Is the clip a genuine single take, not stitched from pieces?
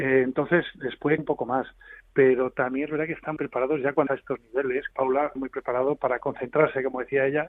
no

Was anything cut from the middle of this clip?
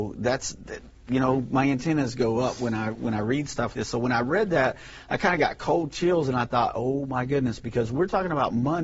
yes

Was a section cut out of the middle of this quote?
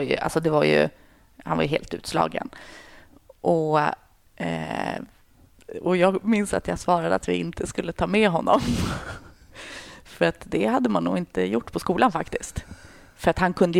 no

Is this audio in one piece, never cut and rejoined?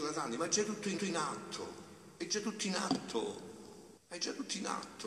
no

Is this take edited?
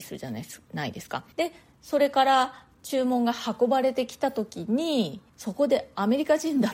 yes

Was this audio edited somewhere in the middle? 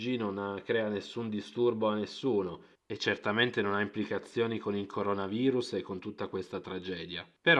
no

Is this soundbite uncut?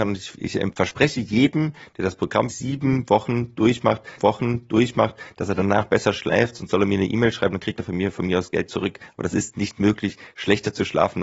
no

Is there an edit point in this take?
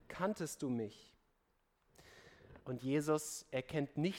yes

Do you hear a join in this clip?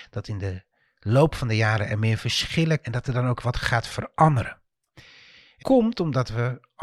yes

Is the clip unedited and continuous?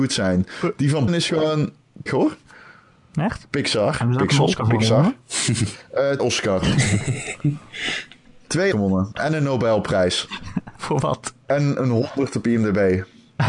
no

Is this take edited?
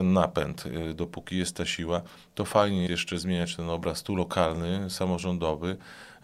yes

